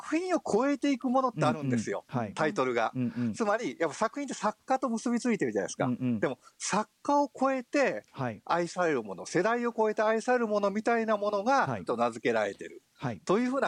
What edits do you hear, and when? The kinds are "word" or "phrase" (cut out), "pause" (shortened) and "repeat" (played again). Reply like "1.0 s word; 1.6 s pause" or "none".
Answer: 11.9 s word